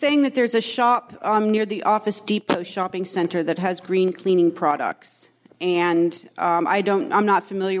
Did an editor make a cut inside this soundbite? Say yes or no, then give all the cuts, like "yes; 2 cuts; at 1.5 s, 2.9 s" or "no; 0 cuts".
no; 0 cuts